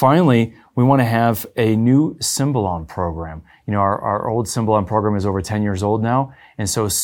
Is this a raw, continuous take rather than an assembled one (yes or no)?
yes